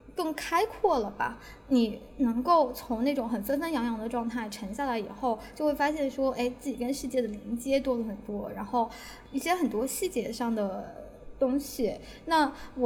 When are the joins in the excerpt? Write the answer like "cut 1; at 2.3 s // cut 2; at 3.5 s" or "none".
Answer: none